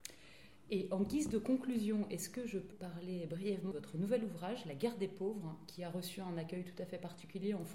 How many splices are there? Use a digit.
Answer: 2